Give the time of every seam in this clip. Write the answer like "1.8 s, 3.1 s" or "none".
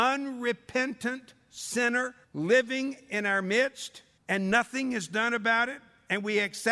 2.2 s, 4.2 s